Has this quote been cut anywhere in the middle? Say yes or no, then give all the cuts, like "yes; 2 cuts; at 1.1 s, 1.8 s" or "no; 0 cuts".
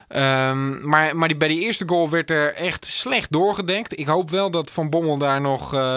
no; 0 cuts